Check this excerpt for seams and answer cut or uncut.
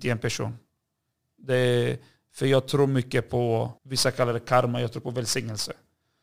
cut